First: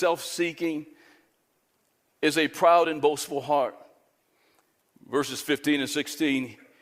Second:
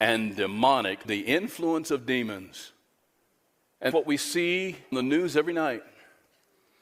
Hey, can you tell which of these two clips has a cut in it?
second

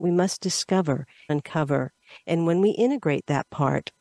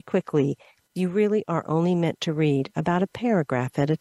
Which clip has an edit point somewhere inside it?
first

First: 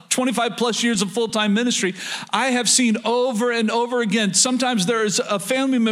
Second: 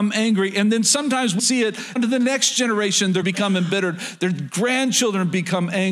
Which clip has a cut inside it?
second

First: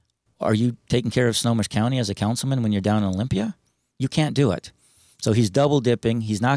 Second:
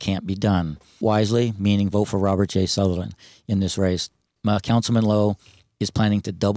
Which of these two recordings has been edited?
second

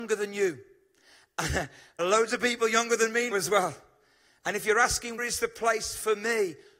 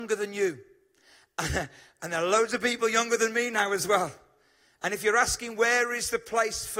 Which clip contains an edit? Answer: first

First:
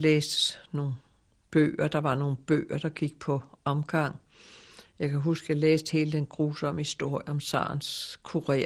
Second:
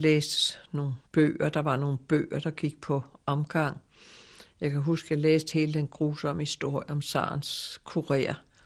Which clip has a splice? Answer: second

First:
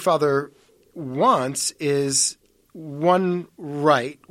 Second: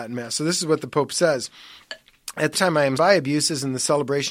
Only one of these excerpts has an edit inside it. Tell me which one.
second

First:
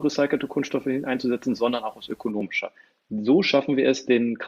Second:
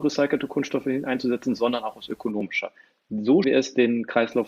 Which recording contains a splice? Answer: second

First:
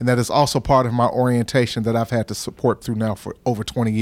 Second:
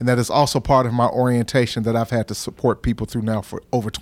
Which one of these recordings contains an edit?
first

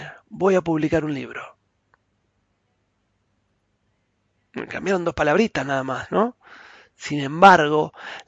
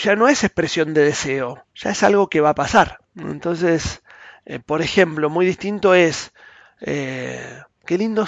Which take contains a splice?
second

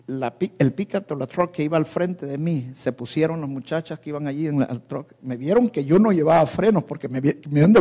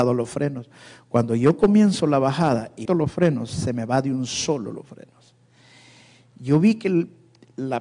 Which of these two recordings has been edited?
second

